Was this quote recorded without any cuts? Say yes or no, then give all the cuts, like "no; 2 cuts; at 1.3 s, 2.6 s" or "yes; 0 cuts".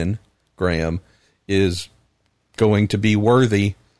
yes; 0 cuts